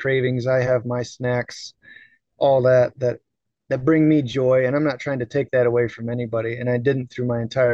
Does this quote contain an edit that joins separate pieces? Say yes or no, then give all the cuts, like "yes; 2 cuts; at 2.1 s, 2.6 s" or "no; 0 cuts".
no; 0 cuts